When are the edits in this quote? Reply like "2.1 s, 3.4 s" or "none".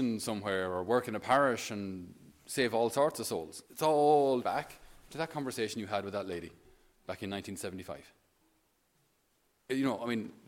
3.7 s, 4.4 s